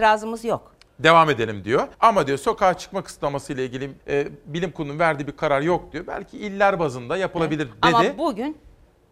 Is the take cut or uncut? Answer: cut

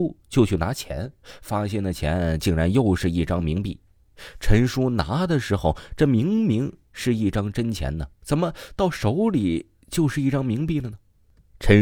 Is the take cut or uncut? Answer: cut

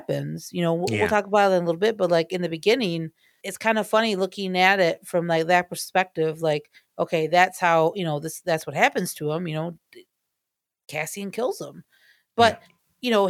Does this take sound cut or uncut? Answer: cut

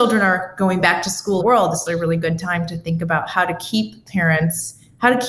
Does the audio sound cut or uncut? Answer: cut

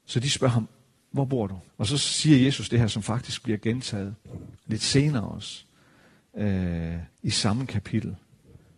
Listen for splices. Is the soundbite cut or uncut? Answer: cut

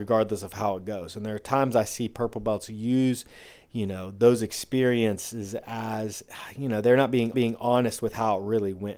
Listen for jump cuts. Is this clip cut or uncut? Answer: cut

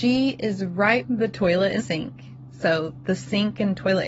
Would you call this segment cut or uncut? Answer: cut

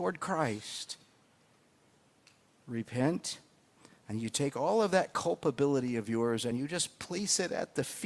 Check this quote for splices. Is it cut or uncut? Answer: uncut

